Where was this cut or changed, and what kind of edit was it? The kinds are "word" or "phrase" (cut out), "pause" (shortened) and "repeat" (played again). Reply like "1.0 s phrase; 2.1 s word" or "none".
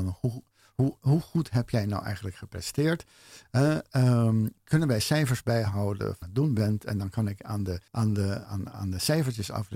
6.2 s phrase; 7.9 s pause; 8.4 s word